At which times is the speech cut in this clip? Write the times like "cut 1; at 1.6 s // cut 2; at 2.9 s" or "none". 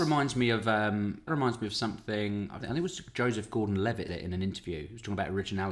cut 1; at 1.3 s // cut 2; at 2.6 s // cut 3; at 4.1 s